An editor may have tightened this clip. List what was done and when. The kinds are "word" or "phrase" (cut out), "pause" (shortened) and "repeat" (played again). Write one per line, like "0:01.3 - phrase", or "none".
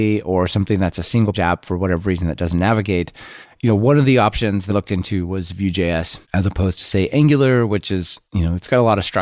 0:01.3 - word
0:03.4 - pause
0:04.7 - word
0:06.2 - pause